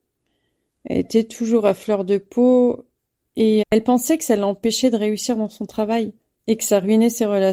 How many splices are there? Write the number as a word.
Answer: one